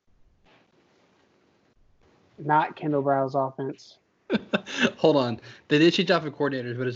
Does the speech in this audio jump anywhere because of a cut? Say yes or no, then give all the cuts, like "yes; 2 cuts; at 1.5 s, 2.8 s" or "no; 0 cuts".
no; 0 cuts